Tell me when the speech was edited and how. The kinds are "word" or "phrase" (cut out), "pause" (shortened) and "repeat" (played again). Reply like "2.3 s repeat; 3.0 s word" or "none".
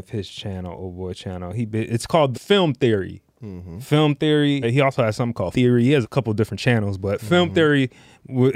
2.3 s word; 3.3 s pause; 4.6 s word; 5.5 s word; 6.0 s word